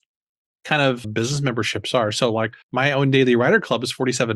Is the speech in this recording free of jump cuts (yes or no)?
no